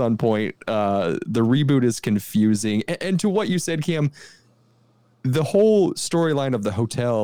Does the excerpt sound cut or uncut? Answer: uncut